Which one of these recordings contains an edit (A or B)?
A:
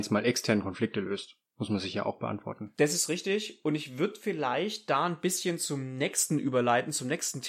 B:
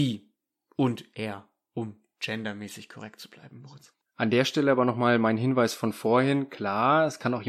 B